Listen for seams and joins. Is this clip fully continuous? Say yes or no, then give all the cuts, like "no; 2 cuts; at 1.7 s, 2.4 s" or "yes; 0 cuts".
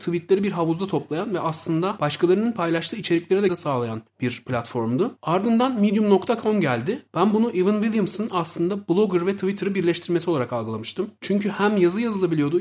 no; 1 cut; at 3.5 s